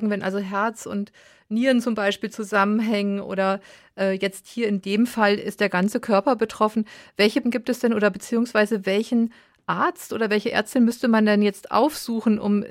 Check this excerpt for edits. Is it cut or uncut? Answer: cut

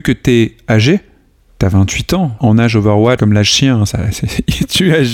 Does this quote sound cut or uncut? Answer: cut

